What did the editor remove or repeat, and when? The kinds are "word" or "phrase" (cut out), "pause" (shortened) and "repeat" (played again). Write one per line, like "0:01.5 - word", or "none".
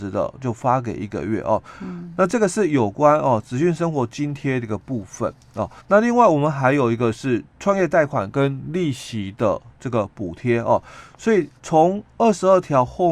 0:05.8 - pause
0:11.6 - pause